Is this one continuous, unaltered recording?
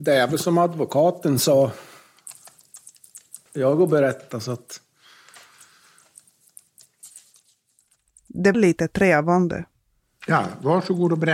no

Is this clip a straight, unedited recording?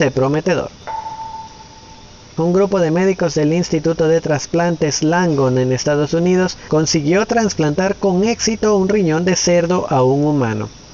yes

